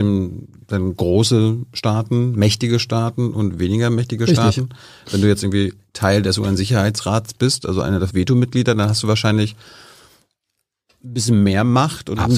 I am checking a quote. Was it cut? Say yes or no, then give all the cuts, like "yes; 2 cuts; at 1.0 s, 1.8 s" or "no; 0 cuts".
yes; 1 cut; at 8.1 s